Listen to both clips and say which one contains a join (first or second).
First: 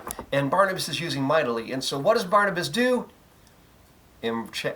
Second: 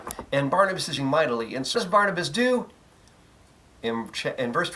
second